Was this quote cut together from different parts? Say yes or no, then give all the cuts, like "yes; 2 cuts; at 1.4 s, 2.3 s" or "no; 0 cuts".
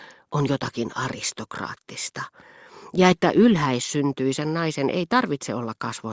no; 0 cuts